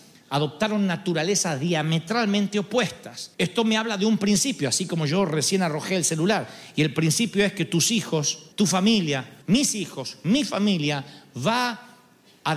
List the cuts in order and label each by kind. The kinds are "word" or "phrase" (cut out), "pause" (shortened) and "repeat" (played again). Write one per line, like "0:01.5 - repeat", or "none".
0:03.3 - pause
0:08.5 - pause
0:09.4 - pause